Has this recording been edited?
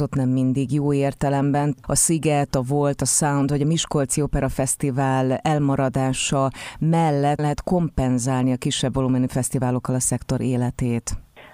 yes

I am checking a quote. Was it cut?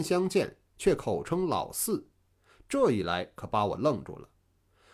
no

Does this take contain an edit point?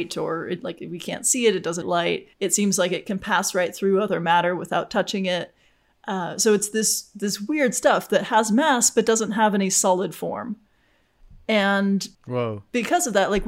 yes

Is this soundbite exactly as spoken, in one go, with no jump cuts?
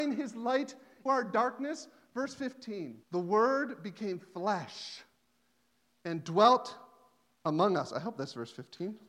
no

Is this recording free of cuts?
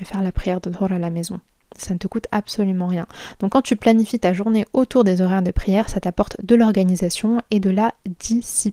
yes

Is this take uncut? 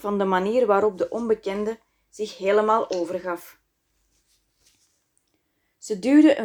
yes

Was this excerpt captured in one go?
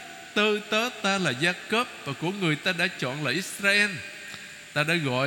yes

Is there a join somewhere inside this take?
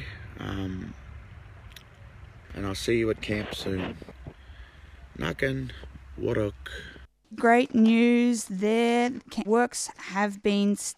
yes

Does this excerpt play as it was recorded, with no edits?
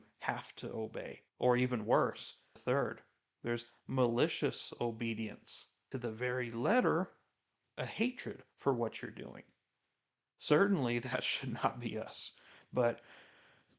no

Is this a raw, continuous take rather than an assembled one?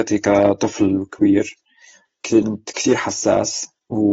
yes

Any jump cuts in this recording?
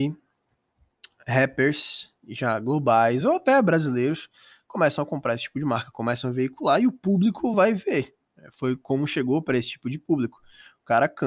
no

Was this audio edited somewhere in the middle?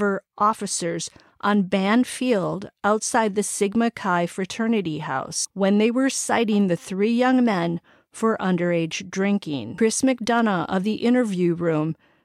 no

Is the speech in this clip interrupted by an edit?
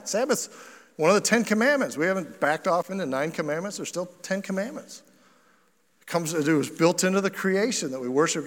no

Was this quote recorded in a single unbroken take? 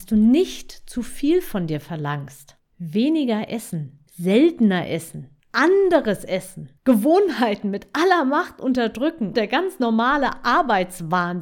no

